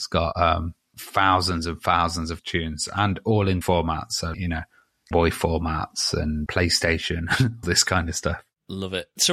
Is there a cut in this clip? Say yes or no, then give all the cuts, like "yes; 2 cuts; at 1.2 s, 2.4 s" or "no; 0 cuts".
yes; 7 cuts; at 0.9 s, 2.4 s, 3.6 s, 4.3 s, 5.1 s, 6.5 s, 7.6 s